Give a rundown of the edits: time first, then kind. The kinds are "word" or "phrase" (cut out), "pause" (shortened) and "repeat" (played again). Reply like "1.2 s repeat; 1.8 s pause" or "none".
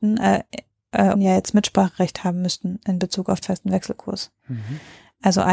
1.1 s word; 3.4 s word